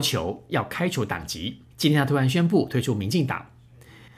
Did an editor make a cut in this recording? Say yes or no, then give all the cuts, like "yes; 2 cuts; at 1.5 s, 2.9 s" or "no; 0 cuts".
yes; 1 cut; at 1.7 s